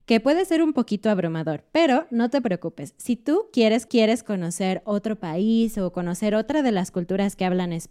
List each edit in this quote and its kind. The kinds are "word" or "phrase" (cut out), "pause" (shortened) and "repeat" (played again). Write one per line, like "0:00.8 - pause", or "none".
0:03.9 - repeat

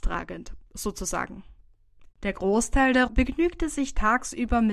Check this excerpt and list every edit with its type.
0:02.1 - pause
0:03.1 - word

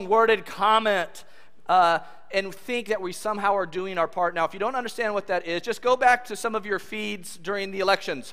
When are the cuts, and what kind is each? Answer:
none

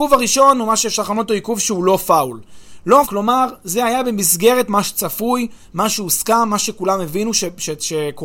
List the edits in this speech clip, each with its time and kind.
0:03.0 - word

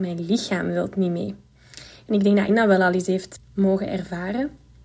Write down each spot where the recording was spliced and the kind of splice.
0:02.5 - word
0:03.4 - word

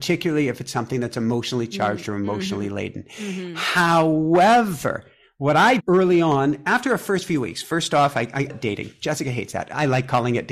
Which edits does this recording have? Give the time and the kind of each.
0:05.8 - phrase
0:08.5 - phrase

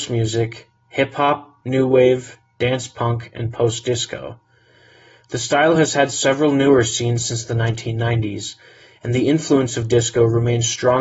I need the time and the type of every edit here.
none

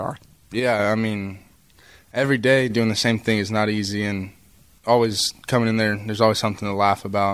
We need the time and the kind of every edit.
none

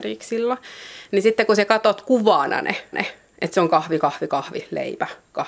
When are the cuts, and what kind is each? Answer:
0:02.9 - repeat

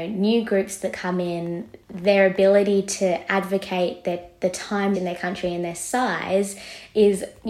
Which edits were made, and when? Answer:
0:01.8 - pause
0:04.9 - phrase

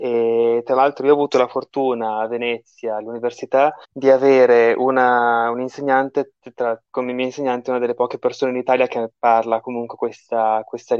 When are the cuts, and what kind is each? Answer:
0:03.8 - pause

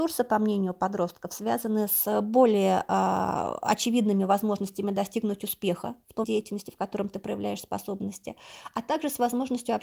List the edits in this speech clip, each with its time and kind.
0:06.2 - word

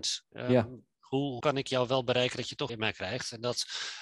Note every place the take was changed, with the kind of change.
0:01.4 - word
0:02.7 - word

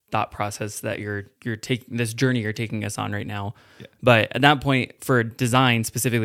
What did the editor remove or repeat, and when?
0:01.4 - pause

